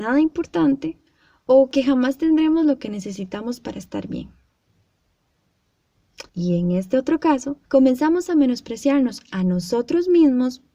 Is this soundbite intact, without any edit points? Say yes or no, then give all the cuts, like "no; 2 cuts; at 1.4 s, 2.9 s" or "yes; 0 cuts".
no; 2 cuts; at 6.3 s, 7.7 s